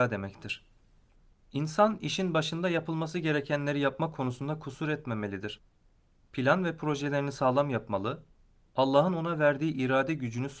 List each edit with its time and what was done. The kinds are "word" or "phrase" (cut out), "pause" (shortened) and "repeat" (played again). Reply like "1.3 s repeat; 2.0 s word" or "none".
none

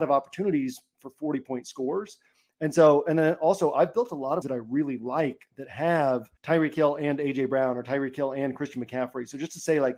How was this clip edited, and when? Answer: 4.4 s word; 6.4 s pause

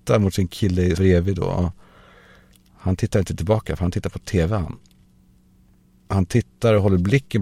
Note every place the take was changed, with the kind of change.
1.0 s word

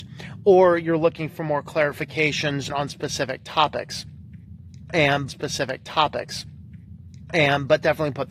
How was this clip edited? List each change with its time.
2.7 s phrase; 5.3 s repeat

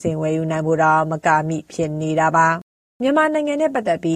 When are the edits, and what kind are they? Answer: 2.8 s pause

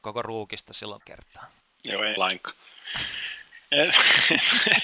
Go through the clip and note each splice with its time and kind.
1.0 s phrase; 1.6 s pause; 2.2 s word

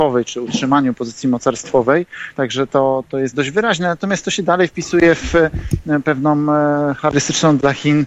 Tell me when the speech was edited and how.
none

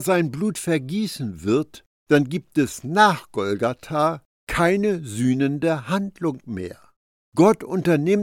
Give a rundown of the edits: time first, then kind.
none

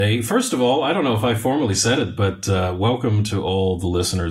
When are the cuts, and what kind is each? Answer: none

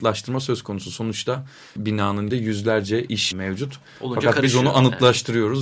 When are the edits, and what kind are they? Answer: 1.8 s word; 2.3 s word; 3.3 s phrase

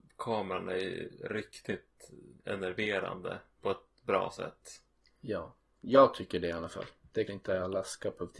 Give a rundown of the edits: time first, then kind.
7.3 s word

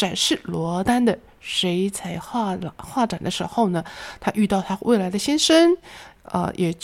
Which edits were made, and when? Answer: none

